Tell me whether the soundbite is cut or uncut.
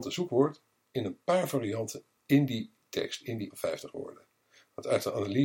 cut